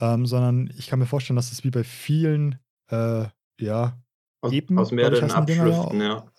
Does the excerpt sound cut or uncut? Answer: uncut